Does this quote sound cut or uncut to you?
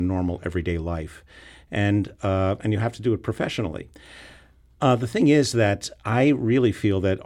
uncut